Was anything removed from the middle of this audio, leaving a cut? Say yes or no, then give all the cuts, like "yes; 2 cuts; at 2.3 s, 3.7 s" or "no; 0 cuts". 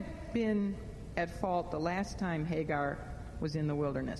no; 0 cuts